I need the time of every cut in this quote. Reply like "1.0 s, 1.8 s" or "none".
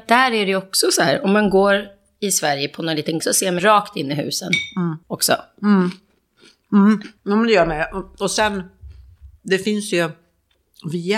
3.2 s, 3.6 s, 5.0 s, 7.2 s, 9.4 s